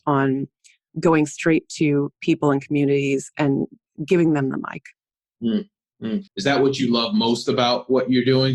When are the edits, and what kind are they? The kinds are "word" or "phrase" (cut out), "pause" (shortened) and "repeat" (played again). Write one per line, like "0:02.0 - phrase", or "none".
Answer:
0:06.3 - pause